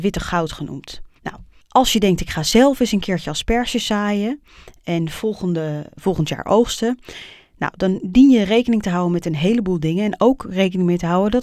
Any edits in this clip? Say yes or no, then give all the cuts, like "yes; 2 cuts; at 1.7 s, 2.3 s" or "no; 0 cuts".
no; 0 cuts